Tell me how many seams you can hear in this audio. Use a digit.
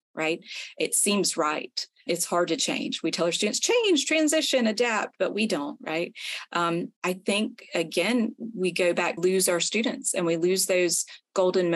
3